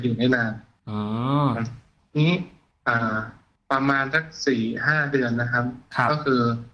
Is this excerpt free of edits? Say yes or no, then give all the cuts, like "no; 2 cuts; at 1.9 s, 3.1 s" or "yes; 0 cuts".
yes; 0 cuts